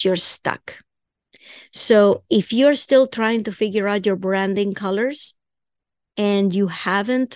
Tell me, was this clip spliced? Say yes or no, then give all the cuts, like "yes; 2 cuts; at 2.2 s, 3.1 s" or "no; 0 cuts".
no; 0 cuts